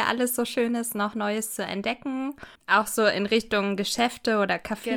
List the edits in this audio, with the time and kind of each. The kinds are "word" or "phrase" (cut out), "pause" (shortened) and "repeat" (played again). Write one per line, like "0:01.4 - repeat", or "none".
0:02.5 - pause